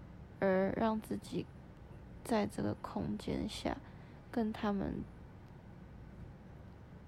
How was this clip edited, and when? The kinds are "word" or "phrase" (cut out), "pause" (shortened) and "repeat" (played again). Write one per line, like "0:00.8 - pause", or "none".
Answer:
none